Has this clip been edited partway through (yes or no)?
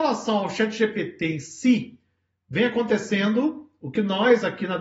no